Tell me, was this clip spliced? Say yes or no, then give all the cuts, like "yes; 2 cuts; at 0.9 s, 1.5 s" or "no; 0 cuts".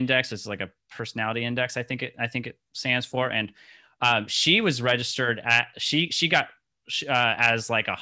no; 0 cuts